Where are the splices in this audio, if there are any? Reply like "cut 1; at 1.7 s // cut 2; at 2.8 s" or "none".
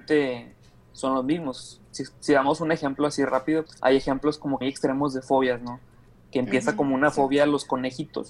cut 1; at 3.7 s // cut 2; at 4.6 s

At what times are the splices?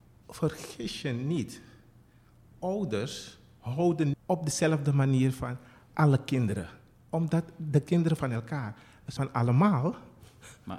cut 1; at 4.1 s // cut 2; at 8.2 s // cut 3; at 9.2 s

